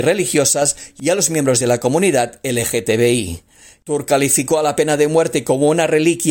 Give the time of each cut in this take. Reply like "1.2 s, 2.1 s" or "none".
none